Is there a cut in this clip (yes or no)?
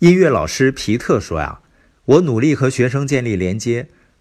no